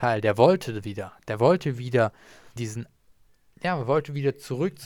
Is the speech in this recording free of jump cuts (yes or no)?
no